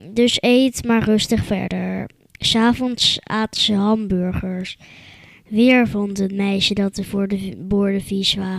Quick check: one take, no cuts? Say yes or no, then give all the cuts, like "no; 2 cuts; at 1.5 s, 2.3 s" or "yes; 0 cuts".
yes; 0 cuts